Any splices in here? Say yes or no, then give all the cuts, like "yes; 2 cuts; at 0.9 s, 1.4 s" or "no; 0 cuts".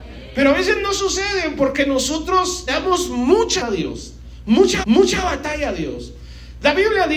yes; 3 cuts; at 2.7 s, 3.6 s, 4.8 s